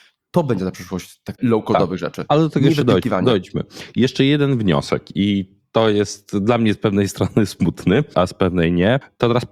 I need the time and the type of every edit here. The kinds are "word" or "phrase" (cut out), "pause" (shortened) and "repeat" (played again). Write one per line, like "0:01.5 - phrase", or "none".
0:01.4 - phrase